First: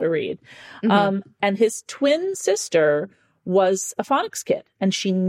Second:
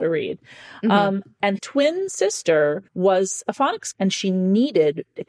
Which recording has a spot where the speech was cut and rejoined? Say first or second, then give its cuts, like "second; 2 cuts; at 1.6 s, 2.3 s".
second; 3 cuts; at 1.6 s, 2.9 s, 3.9 s